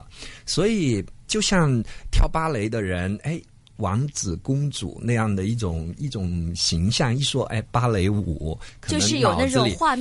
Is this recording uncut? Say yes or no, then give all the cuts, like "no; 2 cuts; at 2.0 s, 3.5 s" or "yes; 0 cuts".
no; 1 cut; at 1.3 s